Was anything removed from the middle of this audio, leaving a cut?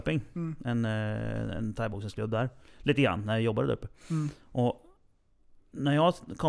no; 0 cuts

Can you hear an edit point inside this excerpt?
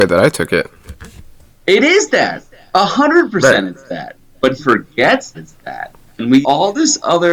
yes; 3 cuts; at 4.6 s, 5.3 s, 6.4 s

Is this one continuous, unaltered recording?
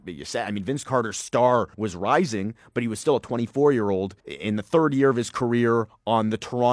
no; 2 cuts; at 1.7 s, 4.2 s

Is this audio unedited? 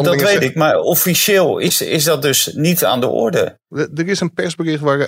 yes; 0 cuts

